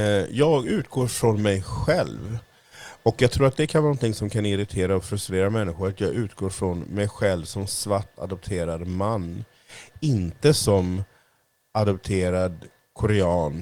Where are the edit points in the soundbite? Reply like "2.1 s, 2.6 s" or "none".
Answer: none